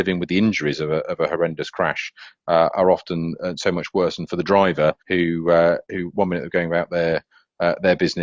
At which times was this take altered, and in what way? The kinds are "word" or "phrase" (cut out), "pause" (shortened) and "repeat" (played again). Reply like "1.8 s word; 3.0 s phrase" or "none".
5.0 s pause